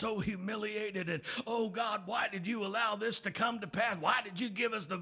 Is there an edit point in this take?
no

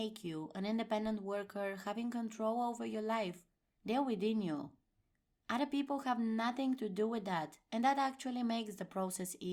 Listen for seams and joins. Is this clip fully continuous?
yes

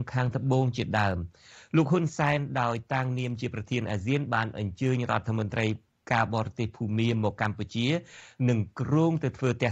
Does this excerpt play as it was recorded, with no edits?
yes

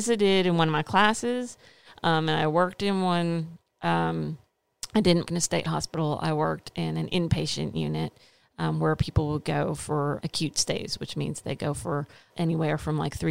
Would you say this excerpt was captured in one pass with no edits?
no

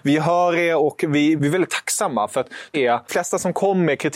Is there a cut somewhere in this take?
yes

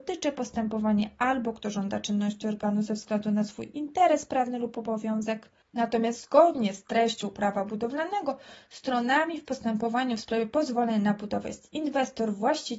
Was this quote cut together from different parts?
no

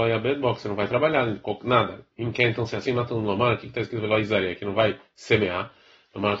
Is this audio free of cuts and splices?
yes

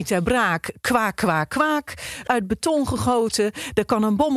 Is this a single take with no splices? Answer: no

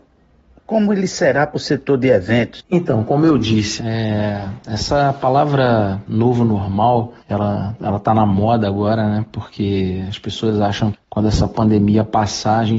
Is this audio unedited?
no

